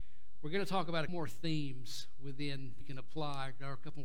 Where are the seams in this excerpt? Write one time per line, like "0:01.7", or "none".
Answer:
0:01.1
0:02.8